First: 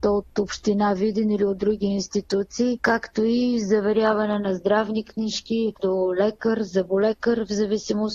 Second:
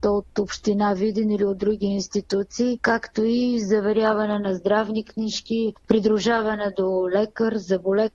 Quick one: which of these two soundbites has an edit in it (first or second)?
first